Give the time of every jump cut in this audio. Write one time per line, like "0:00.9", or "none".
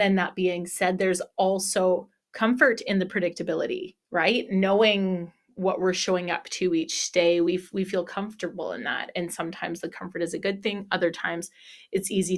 0:04.0

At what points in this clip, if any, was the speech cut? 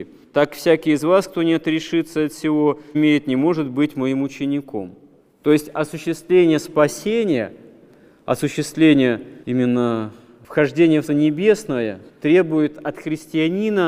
0:02.9
0:09.4
0:11.1
0:12.1

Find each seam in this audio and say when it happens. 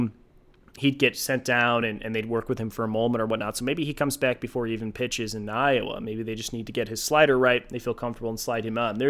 none

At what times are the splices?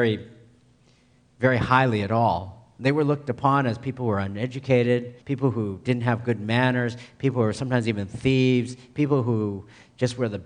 0:05.2

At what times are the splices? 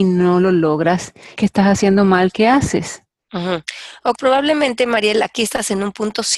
0:01.4
0:04.2

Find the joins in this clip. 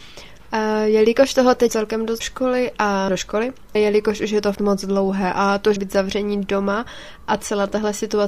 0:01.7
0:02.2
0:03.1
0:03.8
0:04.6
0:05.8

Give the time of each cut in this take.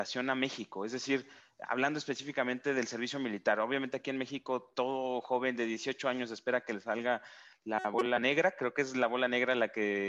0:04.7

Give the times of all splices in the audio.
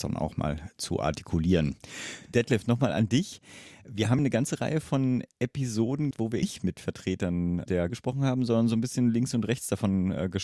0:04.2
0:06.1
0:06.4
0:07.9

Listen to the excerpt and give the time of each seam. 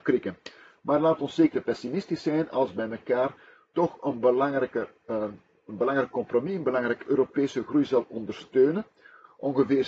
0:01.5
0:07.0

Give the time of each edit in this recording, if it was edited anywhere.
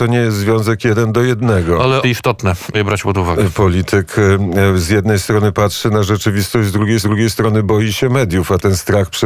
0:02.0
0:02.7
0:07.0

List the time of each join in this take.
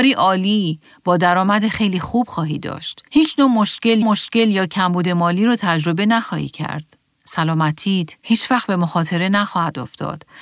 0:03.1
0:04.0
0:08.2

